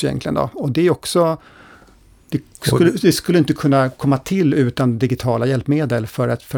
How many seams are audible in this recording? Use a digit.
0